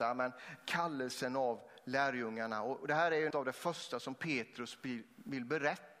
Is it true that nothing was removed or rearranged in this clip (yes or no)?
no